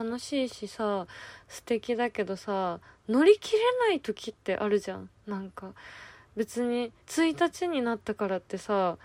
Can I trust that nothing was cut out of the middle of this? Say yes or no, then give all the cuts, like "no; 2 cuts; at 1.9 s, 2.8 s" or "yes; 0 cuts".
no; 1 cut; at 7.0 s